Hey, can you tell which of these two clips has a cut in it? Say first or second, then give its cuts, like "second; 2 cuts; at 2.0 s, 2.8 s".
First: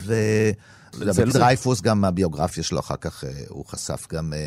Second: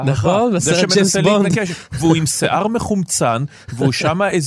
first; 1 cut; at 1.3 s